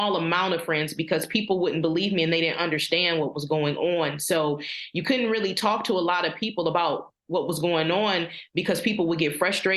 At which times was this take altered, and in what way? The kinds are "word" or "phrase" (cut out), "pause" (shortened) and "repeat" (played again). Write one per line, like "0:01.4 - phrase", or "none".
0:07.2 - pause